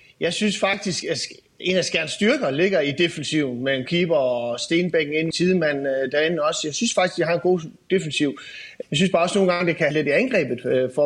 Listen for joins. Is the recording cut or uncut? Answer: cut